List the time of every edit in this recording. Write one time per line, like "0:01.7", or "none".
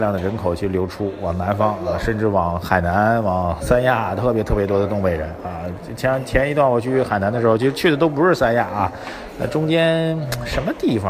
none

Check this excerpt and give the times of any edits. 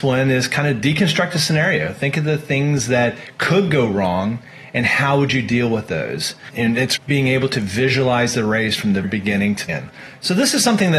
0:07.0
0:09.0
0:09.7

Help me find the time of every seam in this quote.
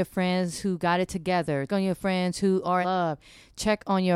0:01.7
0:02.8

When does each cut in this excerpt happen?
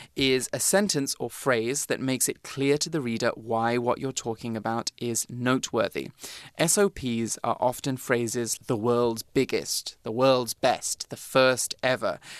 0:08.6

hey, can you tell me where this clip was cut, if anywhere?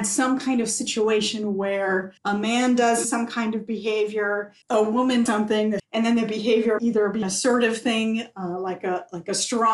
0:02.2
0:03.0
0:04.6
0:05.3
0:05.8
0:06.8
0:07.2

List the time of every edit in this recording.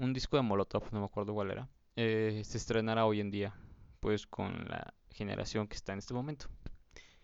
0:01.7

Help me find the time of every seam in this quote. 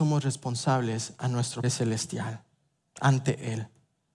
0:01.6

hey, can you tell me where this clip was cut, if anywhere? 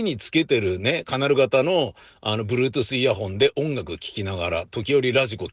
none

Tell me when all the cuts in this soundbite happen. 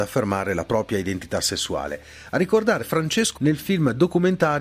0:02.8
0:03.4

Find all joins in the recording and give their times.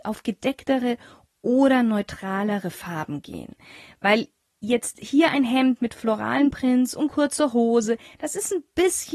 none

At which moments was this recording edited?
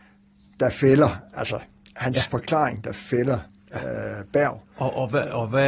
none

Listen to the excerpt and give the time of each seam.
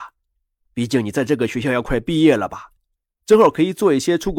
none

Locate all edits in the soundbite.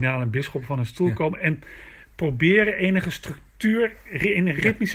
none

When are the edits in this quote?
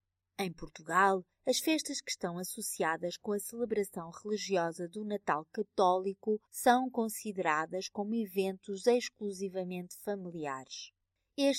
0:06.5

